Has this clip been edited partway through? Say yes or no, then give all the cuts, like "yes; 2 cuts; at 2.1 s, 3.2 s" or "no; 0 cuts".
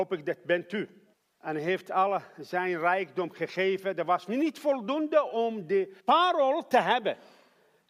yes; 2 cuts; at 1.1 s, 6.0 s